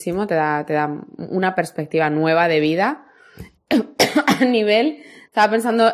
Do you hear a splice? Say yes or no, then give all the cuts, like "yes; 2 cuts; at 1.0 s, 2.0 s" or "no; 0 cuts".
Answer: no; 0 cuts